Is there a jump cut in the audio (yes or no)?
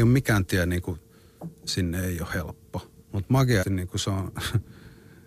yes